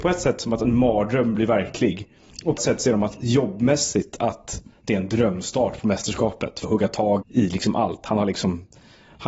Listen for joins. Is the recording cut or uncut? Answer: cut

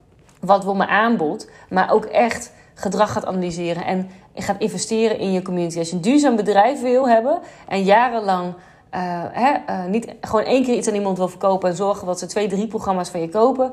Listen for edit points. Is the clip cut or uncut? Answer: uncut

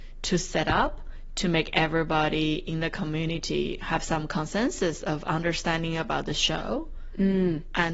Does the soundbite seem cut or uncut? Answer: uncut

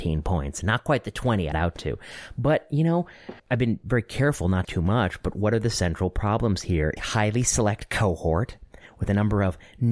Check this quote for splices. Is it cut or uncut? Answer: cut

